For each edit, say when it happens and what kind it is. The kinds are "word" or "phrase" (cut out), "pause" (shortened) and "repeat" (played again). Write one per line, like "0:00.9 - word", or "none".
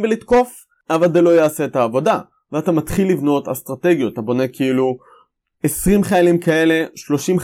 none